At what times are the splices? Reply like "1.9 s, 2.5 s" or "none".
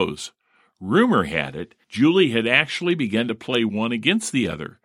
1.8 s